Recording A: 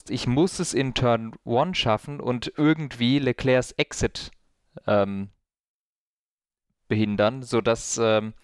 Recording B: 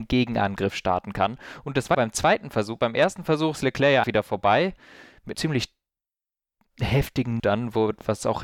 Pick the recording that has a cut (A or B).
B